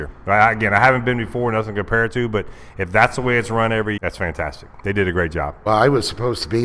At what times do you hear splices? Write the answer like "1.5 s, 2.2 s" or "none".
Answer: 4.0 s